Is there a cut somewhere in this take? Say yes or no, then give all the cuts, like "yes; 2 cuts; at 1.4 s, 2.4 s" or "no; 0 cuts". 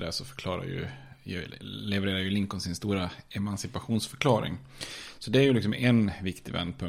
no; 0 cuts